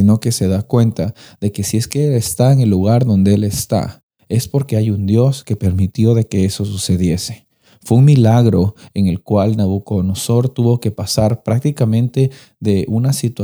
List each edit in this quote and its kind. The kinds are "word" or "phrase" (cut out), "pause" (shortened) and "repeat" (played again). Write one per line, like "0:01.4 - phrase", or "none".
none